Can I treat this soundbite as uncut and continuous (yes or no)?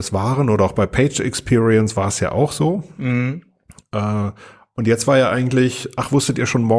yes